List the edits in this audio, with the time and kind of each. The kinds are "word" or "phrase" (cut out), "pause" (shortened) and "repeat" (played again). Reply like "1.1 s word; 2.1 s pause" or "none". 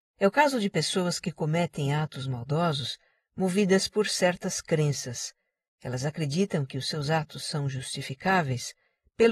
none